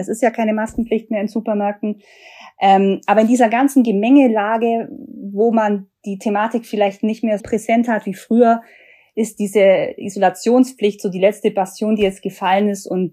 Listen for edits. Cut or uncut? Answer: cut